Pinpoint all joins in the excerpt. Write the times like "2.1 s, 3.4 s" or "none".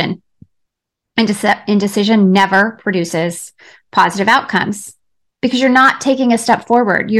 none